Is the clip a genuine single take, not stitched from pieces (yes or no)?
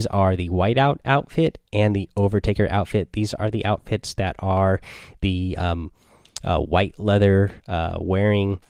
no